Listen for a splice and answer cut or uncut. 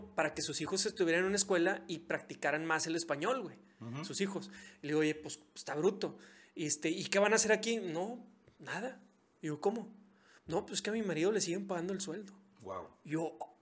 uncut